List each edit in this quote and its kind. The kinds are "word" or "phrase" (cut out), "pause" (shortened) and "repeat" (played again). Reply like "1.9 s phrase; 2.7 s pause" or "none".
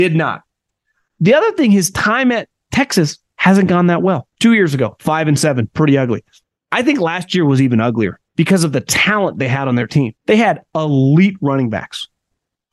4.3 s pause; 6.4 s pause; 8.3 s pause; 10.2 s pause